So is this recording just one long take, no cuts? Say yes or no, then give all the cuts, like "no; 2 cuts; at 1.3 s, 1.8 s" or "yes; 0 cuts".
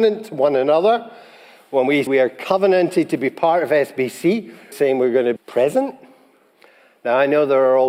no; 3 cuts; at 2.1 s, 4.7 s, 5.4 s